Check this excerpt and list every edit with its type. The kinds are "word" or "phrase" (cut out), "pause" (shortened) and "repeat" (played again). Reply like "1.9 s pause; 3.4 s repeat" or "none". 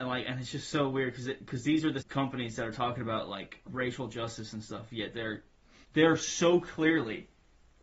2.0 s word; 3.7 s word; 5.8 s word